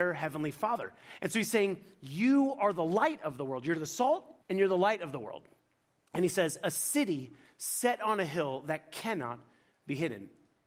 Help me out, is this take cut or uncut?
cut